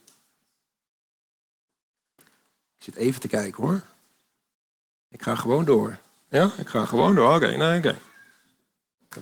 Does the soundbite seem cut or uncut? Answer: uncut